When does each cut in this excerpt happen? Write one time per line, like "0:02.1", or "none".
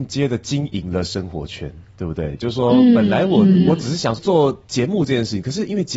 0:04.2